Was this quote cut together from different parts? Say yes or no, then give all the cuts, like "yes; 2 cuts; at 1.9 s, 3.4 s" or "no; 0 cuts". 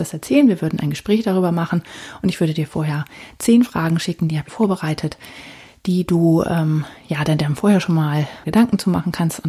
yes; 2 cuts; at 4.5 s, 8.4 s